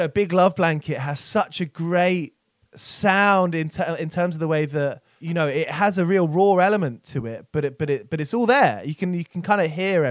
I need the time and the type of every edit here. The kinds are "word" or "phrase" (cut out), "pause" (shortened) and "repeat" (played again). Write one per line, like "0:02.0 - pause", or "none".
none